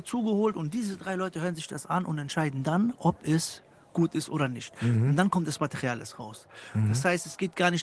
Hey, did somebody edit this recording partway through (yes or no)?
no